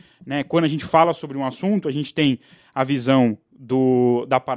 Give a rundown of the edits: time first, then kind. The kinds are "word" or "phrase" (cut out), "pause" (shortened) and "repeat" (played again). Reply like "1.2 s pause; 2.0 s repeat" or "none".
none

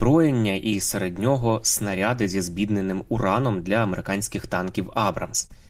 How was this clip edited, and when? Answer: none

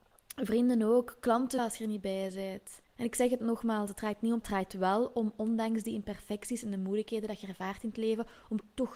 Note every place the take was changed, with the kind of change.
1.6 s phrase; 2.8 s pause; 4.4 s phrase

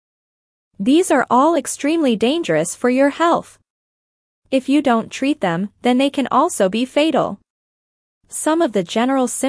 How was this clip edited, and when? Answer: none

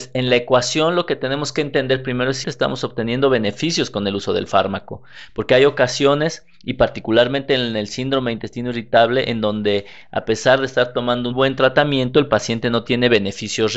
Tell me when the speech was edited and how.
2.4 s word; 6.5 s pause; 11.3 s word

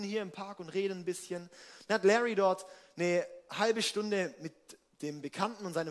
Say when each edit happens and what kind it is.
4.9 s pause

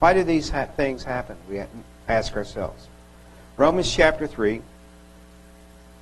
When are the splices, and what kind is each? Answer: none

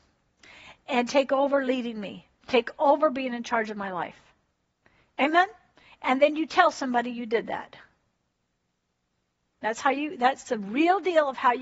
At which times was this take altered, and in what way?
none

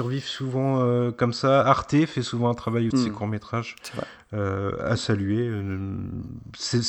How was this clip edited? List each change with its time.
2.9 s phrase

